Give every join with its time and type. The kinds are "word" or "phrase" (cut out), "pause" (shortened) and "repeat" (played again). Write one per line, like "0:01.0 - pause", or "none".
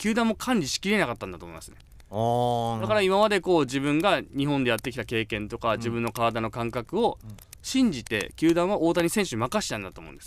none